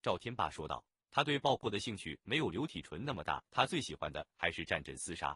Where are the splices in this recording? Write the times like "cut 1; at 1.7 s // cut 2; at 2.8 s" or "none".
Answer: cut 1; at 3.4 s